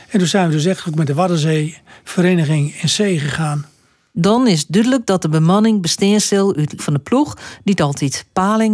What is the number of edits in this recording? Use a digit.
1